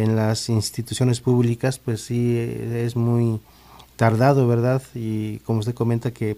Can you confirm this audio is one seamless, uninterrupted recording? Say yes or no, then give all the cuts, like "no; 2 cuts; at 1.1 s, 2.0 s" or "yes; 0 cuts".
yes; 0 cuts